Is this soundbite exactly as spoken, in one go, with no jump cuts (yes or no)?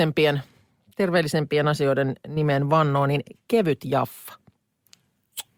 yes